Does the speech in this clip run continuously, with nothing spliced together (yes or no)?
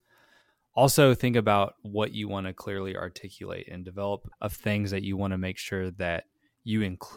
no